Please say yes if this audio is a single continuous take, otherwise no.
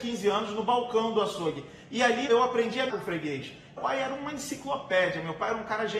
no